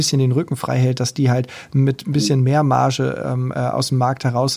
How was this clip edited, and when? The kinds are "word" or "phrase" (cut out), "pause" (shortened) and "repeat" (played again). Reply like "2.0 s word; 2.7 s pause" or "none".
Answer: none